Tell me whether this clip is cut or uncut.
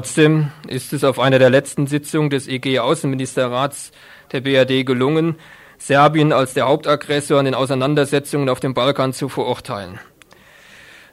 uncut